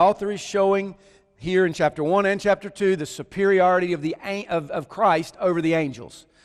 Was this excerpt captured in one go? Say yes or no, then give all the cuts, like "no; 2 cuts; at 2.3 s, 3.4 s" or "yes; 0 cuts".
yes; 0 cuts